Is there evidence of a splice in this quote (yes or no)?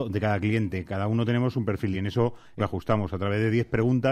yes